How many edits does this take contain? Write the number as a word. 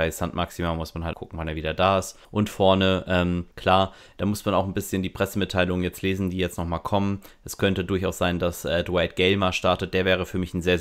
three